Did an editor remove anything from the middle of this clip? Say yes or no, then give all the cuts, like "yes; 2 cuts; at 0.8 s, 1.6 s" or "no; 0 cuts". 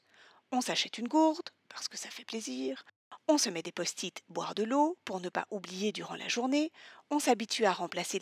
no; 0 cuts